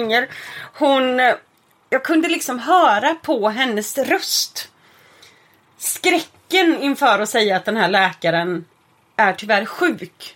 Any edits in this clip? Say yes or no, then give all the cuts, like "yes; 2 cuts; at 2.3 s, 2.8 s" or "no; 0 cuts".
no; 0 cuts